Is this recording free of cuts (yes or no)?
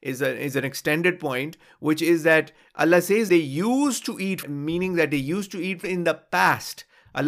no